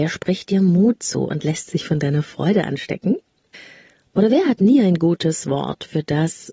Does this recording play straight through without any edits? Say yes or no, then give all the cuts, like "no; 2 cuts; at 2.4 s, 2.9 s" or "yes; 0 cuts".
yes; 0 cuts